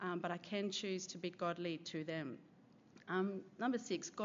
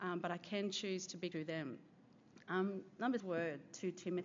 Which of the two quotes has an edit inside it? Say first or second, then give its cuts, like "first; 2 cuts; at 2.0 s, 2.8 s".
second; 2 cuts; at 1.3 s, 3.2 s